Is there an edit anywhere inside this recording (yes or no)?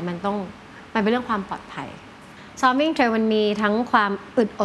no